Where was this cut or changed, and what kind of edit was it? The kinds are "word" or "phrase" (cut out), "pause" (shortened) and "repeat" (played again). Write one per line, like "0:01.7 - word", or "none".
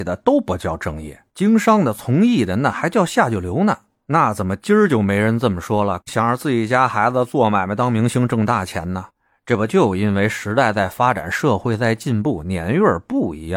none